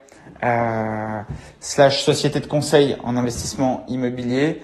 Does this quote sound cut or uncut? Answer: uncut